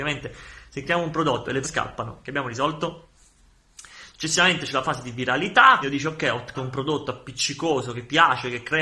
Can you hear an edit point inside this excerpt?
yes; 3 cuts; at 1.6 s, 5.8 s, 6.5 s

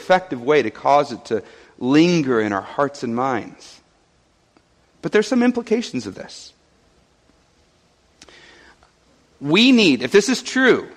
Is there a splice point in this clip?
no; 0 cuts

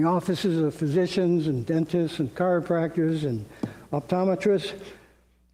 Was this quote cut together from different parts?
no; 0 cuts

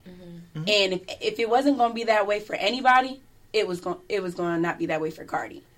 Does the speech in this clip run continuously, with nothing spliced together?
yes; 0 cuts

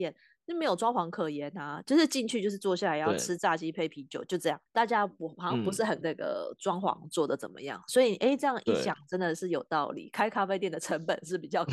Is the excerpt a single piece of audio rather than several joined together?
no; 2 cuts; at 4.7 s, 6.0 s

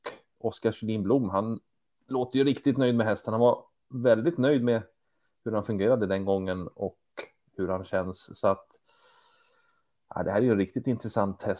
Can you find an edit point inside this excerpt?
no; 0 cuts

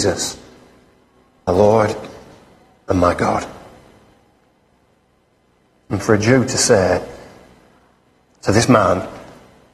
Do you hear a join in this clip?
yes; 1 cut; at 1.5 s

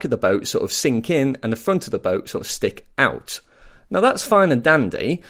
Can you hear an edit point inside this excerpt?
no; 0 cuts

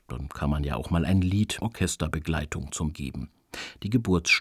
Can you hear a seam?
yes; 2 cuts; at 1.6 s, 2.9 s

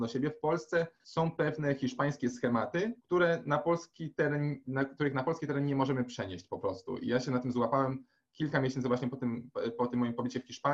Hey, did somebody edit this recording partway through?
yes; 2 cuts; at 0.9 s, 3.0 s

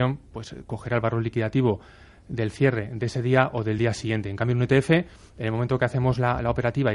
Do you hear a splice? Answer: no; 0 cuts

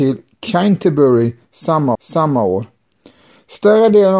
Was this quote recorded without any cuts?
no; 1 cut; at 1.9 s

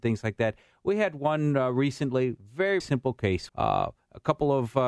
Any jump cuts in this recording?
yes; 2 cuts; at 2.8 s, 3.5 s

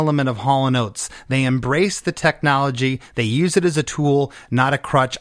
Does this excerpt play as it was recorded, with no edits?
yes; 0 cuts

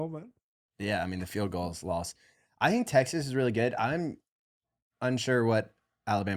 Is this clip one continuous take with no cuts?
yes; 0 cuts

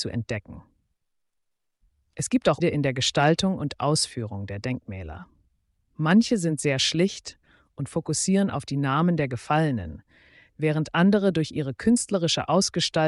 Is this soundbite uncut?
no; 1 cut; at 2.6 s

